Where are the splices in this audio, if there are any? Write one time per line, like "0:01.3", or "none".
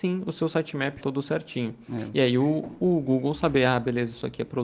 0:01.0